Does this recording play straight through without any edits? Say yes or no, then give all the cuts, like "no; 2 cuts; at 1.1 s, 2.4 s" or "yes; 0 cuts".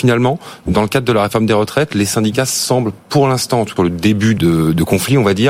no; 2 cuts; at 3.8 s, 4.4 s